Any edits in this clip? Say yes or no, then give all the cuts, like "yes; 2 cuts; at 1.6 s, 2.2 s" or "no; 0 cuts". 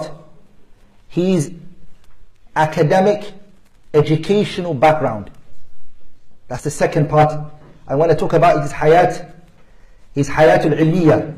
no; 0 cuts